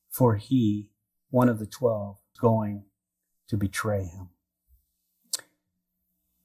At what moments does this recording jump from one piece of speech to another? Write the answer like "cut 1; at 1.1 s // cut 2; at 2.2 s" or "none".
cut 1; at 2.4 s